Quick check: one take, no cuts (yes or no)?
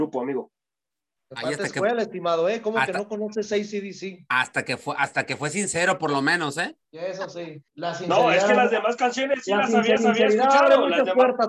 no